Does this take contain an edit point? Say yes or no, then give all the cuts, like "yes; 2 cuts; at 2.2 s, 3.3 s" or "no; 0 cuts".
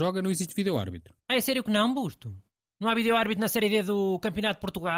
yes; 1 cut; at 1.2 s